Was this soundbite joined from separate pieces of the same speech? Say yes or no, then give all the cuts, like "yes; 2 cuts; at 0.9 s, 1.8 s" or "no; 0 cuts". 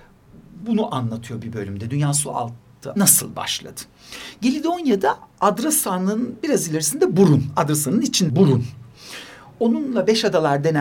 yes; 2 cuts; at 3.0 s, 8.3 s